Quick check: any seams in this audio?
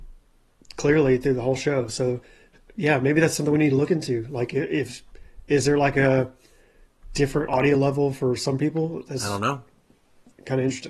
no; 0 cuts

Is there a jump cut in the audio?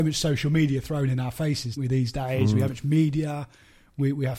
yes; 2 cuts; at 1.8 s, 2.7 s

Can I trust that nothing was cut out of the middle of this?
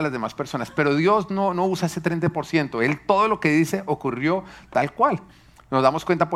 yes; 0 cuts

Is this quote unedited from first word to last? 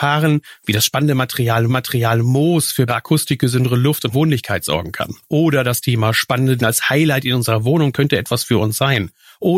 no; 6 cuts; at 1.7 s, 2.9 s, 4.1 s, 5.2 s, 6.6 s, 7.9 s

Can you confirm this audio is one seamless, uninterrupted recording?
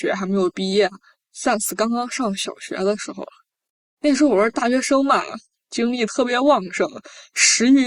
yes; 0 cuts

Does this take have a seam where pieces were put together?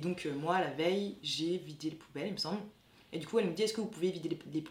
no; 0 cuts

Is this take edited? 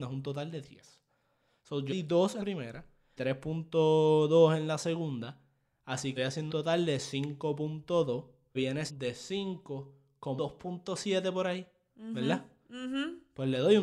yes; 8 cuts; at 1.9 s, 2.4 s, 3.2 s, 6.2 s, 6.5 s, 8.5 s, 8.9 s, 10.4 s

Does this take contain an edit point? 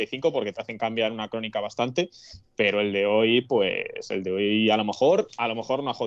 no; 0 cuts

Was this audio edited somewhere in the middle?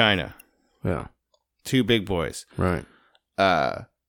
no; 0 cuts

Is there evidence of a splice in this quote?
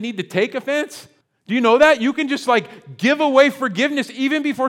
yes; 1 cut; at 1.2 s

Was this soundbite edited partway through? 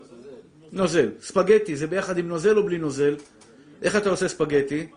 no; 0 cuts

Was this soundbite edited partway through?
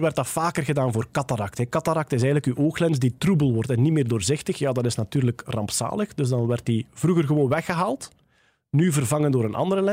no; 0 cuts

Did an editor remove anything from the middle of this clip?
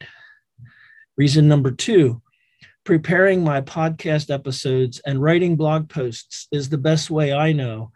no; 0 cuts

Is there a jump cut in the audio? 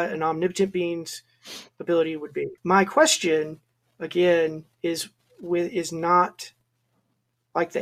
yes; 3 cuts; at 1.7 s, 2.6 s, 4.7 s

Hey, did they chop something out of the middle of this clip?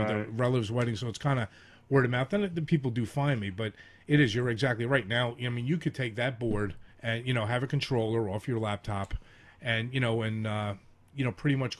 yes; 1 cut; at 6.9 s

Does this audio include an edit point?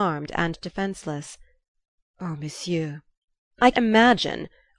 yes; 1 cut; at 3.7 s

